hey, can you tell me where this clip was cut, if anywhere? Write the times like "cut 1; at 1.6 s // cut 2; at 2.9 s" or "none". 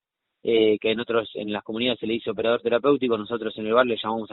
none